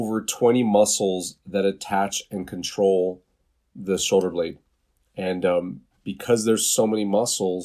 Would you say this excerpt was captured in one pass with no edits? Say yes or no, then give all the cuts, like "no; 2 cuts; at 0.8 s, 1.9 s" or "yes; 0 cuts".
yes; 0 cuts